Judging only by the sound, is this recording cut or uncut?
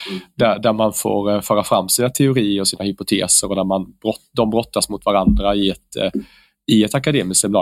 uncut